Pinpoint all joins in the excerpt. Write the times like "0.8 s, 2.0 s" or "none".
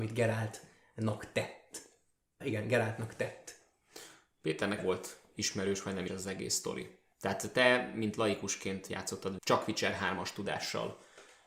2.4 s, 4.8 s, 6.1 s, 9.4 s